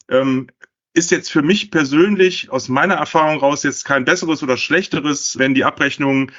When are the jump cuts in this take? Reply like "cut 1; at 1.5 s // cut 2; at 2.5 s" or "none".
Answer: cut 1; at 5.4 s